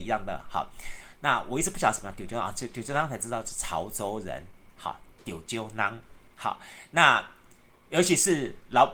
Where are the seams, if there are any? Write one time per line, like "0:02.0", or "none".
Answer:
none